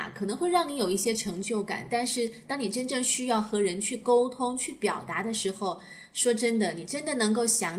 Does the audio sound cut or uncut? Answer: uncut